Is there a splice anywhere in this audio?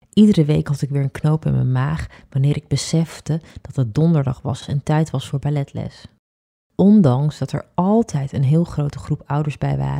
no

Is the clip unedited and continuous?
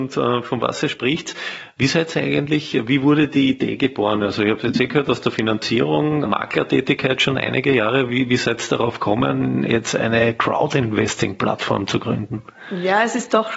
no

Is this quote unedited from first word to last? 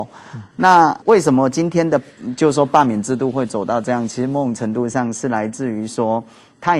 no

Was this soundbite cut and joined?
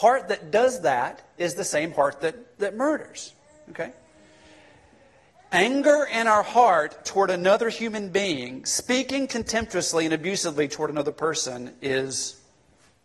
no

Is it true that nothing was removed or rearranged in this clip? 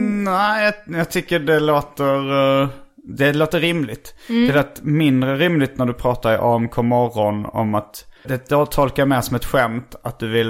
no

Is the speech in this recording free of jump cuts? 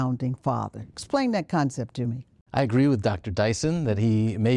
yes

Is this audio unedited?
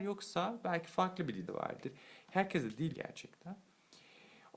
no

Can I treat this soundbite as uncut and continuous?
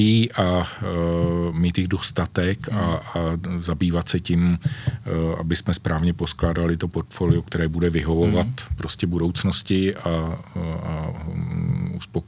yes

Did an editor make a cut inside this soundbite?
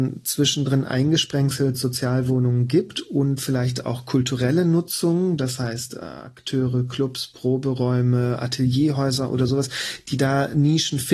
no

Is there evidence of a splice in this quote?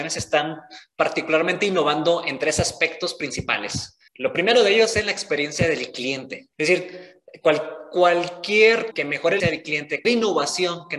yes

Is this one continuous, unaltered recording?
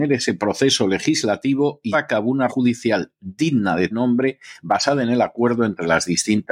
no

